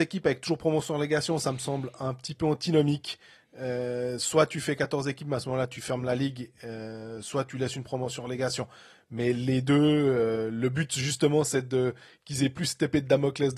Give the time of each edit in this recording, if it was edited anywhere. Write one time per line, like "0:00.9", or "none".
none